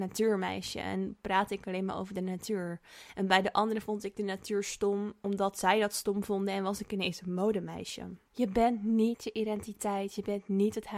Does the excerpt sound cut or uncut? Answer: cut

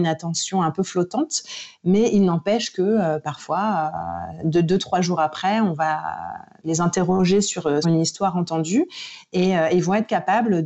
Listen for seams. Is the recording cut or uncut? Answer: cut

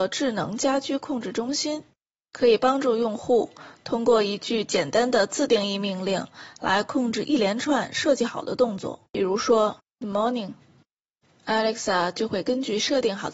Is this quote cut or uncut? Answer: cut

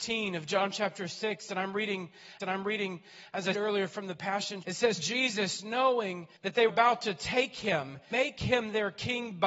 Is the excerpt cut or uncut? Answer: cut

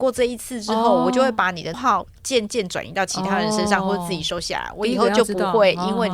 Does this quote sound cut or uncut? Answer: cut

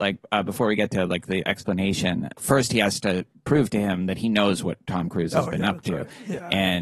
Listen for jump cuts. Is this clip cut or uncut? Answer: uncut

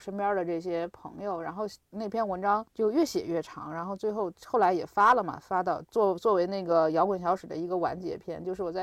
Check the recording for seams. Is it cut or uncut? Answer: cut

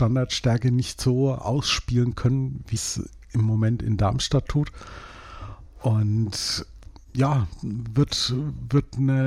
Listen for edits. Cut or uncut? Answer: cut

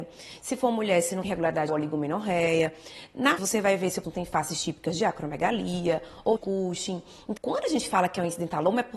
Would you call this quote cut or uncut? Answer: cut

